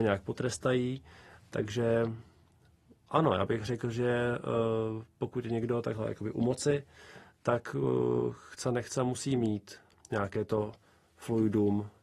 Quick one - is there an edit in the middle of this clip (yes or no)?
no